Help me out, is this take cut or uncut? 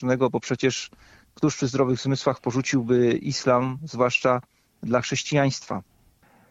uncut